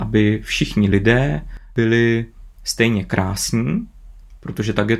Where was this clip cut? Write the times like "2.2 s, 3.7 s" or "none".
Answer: none